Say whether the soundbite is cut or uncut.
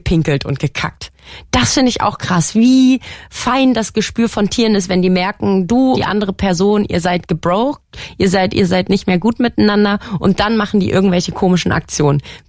cut